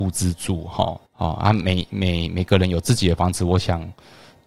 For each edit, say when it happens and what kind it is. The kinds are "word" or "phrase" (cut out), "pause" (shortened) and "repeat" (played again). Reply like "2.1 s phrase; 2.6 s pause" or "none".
1.1 s pause

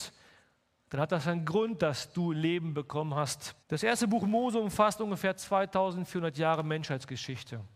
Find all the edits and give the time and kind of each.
3.6 s pause

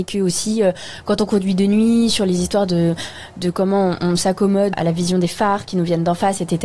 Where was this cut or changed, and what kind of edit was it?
4.7 s word

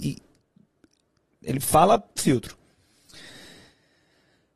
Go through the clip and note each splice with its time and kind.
2.2 s phrase

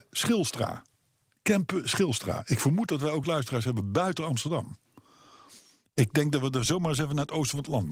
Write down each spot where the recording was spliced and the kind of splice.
none

